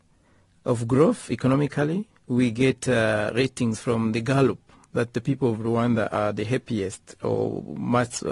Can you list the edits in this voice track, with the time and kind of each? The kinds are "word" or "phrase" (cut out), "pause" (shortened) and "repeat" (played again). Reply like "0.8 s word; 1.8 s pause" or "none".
2.1 s pause